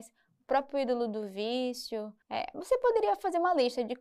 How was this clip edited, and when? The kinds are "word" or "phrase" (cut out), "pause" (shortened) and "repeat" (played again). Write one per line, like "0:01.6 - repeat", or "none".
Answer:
0:02.2 - pause